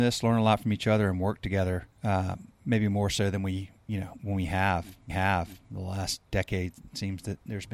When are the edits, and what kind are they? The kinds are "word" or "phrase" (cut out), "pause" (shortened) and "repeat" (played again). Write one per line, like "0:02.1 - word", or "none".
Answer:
0:01.9 - pause
0:05.1 - repeat